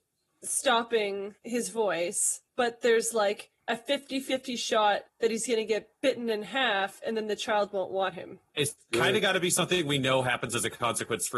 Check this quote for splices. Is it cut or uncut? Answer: cut